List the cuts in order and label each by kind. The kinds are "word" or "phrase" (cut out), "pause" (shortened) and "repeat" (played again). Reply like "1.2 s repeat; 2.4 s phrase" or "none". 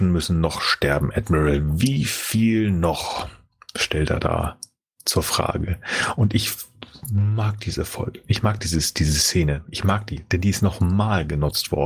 none